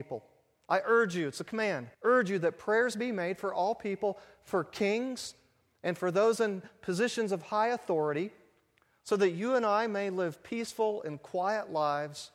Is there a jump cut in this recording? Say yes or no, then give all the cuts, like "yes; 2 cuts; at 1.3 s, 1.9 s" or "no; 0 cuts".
yes; 1 cut; at 1.9 s